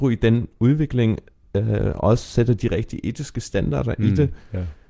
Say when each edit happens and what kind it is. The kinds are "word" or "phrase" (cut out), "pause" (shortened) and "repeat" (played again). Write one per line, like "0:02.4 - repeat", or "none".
none